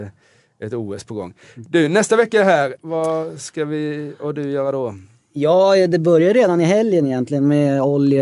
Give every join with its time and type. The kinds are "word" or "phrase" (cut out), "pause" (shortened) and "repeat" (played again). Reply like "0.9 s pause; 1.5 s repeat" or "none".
none